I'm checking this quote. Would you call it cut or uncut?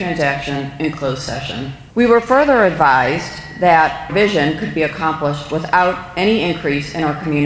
cut